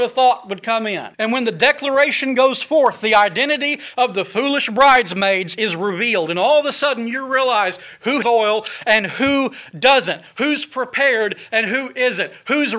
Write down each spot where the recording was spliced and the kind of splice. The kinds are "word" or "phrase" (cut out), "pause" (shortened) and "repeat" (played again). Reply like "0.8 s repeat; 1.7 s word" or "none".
1.1 s pause; 8.2 s word